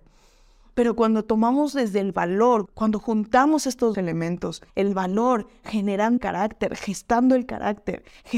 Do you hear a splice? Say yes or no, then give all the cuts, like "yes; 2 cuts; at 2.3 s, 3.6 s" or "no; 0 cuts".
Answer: yes; 4 cuts; at 2.7 s, 3.9 s, 4.7 s, 6.2 s